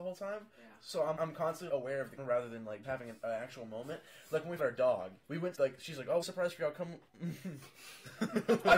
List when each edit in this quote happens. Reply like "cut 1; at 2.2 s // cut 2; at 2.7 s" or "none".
cut 1; at 1.2 s // cut 2; at 1.7 s // cut 3; at 2.2 s // cut 4; at 2.8 s // cut 5; at 4.6 s // cut 6; at 5.2 s // cut 7; at 5.5 s // cut 8; at 6.2 s